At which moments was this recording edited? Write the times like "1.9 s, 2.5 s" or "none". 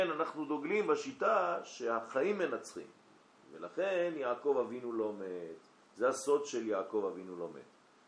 5.8 s